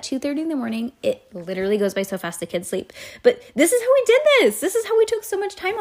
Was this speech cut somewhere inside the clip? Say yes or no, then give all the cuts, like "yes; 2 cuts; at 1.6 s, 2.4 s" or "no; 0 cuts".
no; 0 cuts